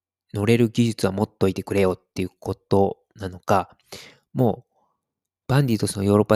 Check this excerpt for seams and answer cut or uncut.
uncut